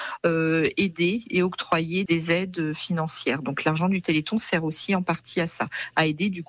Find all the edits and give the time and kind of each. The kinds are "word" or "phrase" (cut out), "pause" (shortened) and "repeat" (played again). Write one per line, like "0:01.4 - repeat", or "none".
0:02.1 - word